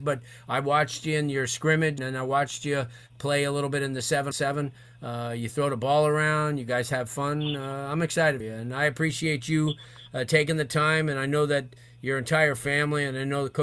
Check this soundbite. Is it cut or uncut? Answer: cut